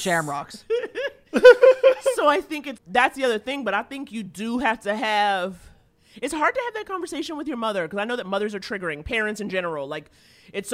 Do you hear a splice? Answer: yes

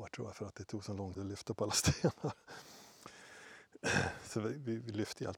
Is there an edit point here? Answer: yes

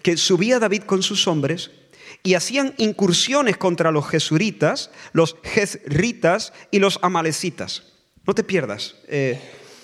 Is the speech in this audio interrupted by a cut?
no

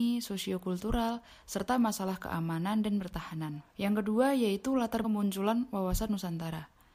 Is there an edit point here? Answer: yes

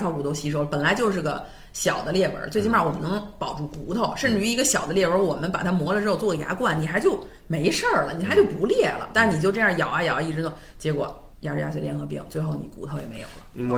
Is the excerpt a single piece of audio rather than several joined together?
no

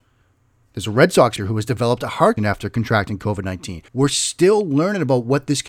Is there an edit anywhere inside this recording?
yes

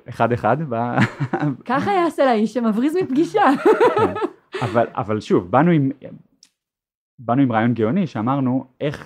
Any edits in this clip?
no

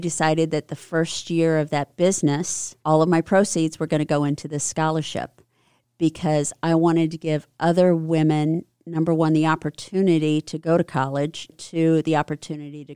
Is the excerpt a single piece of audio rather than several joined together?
no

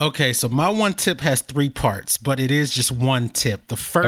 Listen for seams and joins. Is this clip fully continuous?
yes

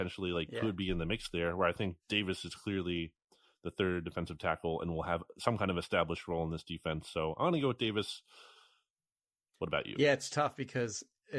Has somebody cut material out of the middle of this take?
no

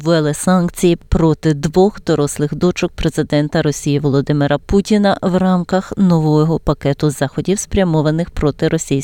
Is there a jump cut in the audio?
no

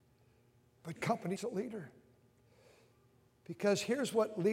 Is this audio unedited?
no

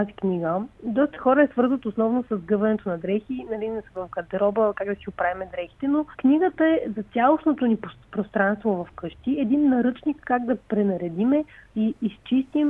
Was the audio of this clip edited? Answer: yes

